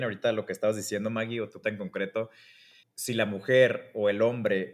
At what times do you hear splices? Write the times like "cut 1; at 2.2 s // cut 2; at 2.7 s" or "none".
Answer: cut 1; at 1.6 s // cut 2; at 2.8 s